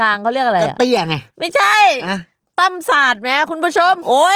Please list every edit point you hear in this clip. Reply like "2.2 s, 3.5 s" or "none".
1.3 s